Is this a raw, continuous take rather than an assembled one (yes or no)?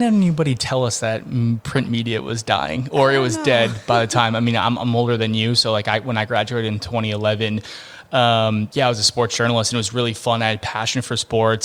yes